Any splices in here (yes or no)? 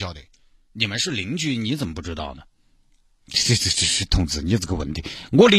no